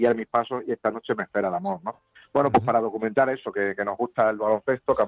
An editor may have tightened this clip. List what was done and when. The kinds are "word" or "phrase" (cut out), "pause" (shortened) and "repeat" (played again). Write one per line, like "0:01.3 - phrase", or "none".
none